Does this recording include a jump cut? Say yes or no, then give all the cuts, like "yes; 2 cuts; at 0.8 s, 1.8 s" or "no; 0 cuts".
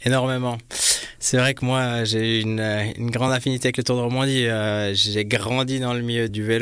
no; 0 cuts